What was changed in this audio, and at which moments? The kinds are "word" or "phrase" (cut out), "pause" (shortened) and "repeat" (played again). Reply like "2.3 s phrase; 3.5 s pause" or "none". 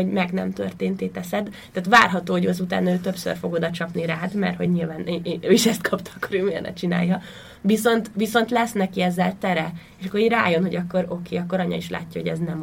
none